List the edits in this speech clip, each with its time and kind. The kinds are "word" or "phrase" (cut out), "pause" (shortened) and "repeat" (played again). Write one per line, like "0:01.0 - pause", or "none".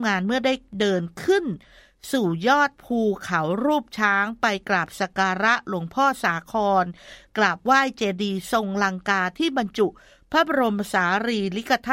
0:02.7 - pause